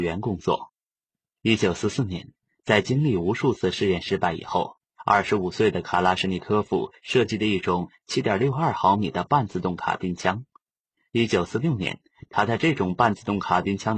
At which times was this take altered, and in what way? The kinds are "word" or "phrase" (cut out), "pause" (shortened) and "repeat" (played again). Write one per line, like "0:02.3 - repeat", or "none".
none